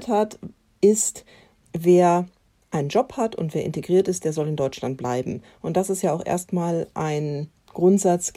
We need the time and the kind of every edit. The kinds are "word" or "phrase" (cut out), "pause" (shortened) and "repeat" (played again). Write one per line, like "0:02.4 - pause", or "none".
none